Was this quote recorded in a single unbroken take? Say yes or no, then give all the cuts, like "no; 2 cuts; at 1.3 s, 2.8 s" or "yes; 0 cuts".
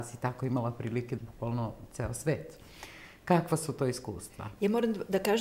no; 1 cut; at 1.2 s